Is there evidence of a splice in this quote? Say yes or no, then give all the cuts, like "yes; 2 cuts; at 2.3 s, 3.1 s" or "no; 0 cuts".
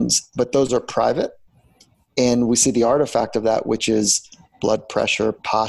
no; 0 cuts